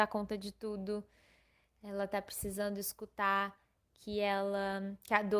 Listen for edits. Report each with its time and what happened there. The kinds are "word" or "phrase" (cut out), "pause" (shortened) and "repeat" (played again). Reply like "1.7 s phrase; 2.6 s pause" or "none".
none